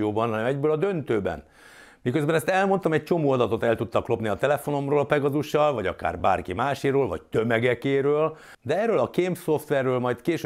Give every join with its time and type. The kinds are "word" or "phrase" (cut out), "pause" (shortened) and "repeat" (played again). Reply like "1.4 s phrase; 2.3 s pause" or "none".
none